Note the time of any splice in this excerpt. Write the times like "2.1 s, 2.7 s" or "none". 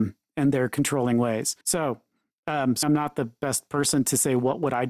1.6 s, 2.8 s